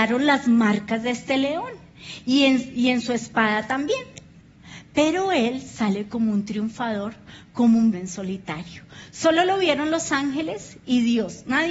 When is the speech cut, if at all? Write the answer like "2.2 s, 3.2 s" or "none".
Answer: 7.9 s